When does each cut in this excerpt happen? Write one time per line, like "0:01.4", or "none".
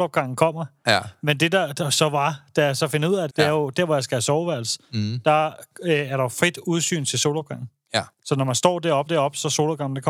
0:03.3
0:08.1
0:09.1